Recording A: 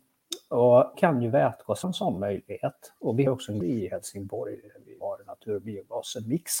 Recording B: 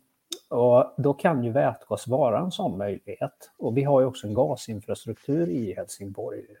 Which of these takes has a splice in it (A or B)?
A